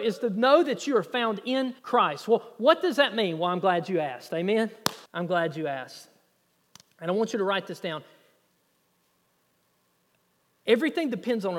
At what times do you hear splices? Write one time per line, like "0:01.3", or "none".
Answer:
0:01.8
0:05.1